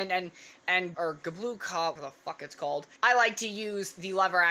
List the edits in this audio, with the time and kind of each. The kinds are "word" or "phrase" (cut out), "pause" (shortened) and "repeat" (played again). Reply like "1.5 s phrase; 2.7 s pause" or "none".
0.9 s word; 2.0 s word; 3.0 s pause